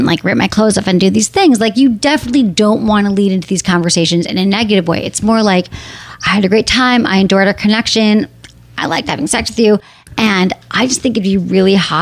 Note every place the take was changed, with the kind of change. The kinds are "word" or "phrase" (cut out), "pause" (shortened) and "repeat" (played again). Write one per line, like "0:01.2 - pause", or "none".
none